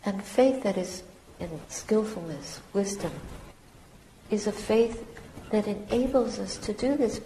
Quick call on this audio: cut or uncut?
cut